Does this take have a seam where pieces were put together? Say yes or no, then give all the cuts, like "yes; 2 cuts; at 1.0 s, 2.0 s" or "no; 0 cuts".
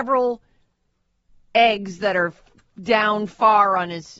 no; 0 cuts